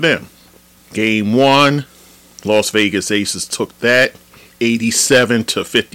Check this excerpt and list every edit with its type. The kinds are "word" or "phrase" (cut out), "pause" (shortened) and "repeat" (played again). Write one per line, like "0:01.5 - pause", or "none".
none